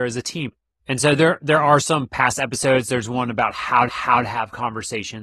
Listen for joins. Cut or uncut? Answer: cut